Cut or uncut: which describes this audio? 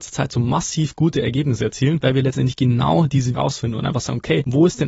cut